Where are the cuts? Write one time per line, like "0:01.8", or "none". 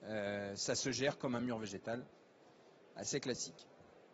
none